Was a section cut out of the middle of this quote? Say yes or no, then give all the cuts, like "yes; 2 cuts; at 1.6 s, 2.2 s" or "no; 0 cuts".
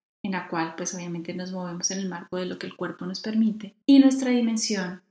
yes; 1 cut; at 3.8 s